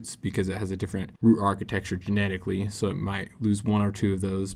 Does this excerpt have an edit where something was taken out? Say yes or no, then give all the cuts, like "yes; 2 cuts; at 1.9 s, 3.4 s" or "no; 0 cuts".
yes; 1 cut; at 1.2 s